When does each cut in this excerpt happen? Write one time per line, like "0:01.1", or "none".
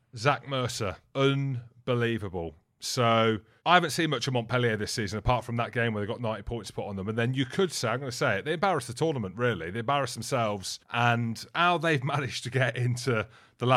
0:10.8